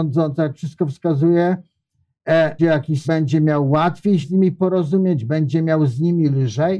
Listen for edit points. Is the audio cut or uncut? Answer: cut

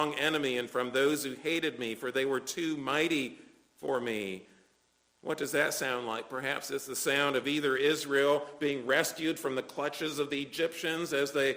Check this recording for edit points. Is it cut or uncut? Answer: uncut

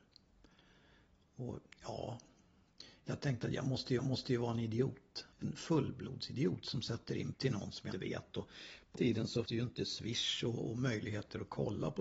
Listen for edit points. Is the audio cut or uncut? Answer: cut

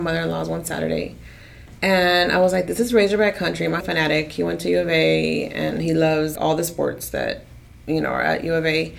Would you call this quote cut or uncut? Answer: cut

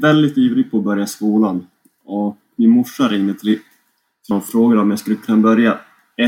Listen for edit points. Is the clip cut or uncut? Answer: cut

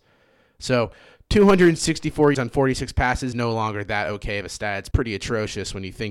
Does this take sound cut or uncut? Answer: cut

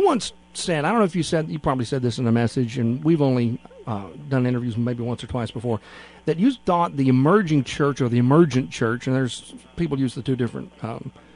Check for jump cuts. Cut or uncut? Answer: uncut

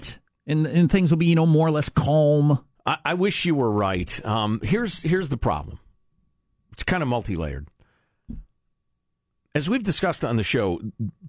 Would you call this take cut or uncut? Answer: uncut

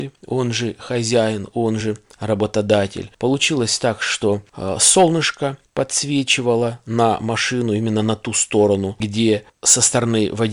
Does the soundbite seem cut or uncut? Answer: uncut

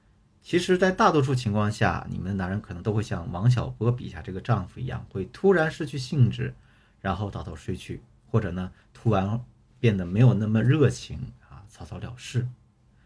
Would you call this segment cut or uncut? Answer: uncut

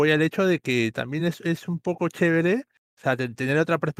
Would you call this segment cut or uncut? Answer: uncut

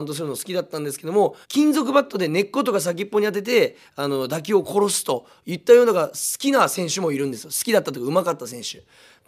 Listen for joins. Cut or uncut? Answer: cut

